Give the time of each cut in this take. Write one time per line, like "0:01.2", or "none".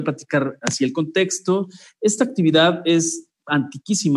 none

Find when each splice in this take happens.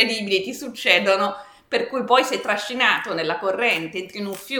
none

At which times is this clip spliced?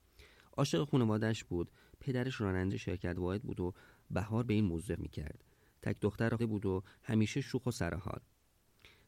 0:02.7
0:05.0
0:06.4

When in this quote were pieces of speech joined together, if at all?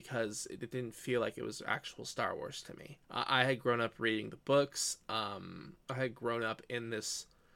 0:03.0
0:05.8

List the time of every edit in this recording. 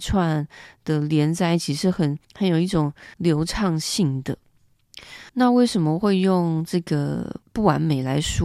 0:02.2
0:03.1
0:05.3

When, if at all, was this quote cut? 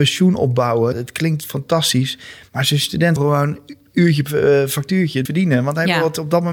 0:00.9
0:03.2
0:05.3

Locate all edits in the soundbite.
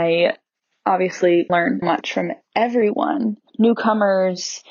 0:01.5
0:01.8
0:03.5

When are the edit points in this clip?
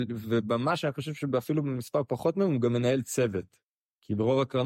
none

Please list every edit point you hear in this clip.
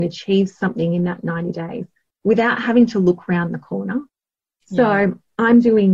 none

